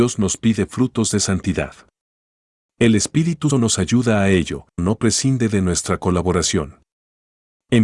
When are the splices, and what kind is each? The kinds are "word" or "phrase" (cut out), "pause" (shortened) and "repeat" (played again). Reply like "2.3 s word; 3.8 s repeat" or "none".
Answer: 3.5 s word; 4.8 s word